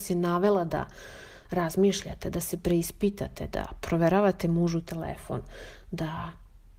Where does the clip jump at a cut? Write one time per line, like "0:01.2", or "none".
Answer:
none